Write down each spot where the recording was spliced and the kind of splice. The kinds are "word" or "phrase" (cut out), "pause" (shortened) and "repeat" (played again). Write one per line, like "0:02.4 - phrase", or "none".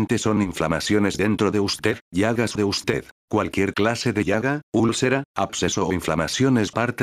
0:02.6 - phrase
0:03.1 - pause

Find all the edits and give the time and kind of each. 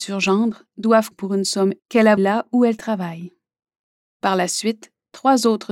0:01.1 - word
0:01.8 - word
0:02.2 - word

